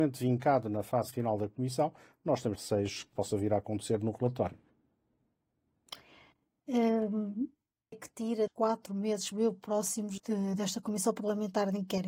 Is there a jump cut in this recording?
yes; 6 cuts; at 2.6 s, 3.1 s, 7.9 s, 8.5 s, 9.3 s, 10.2 s

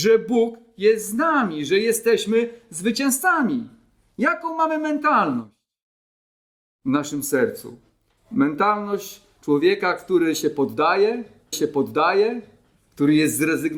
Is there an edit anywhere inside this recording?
yes; 1 cut; at 11.5 s

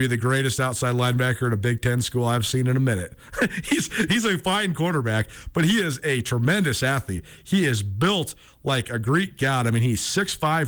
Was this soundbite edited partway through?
no; 0 cuts

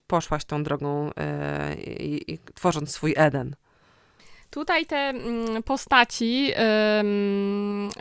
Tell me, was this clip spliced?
no; 0 cuts

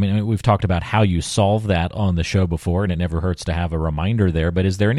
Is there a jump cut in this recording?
no; 0 cuts

